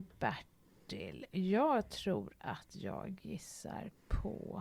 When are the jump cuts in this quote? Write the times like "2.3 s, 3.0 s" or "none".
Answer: none